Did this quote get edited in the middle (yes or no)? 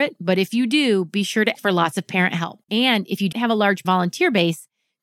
yes